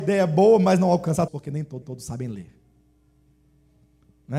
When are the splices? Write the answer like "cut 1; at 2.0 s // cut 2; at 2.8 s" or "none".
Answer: cut 1; at 1.3 s // cut 2; at 1.8 s